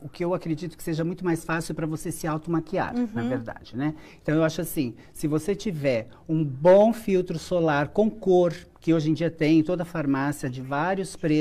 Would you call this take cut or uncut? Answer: cut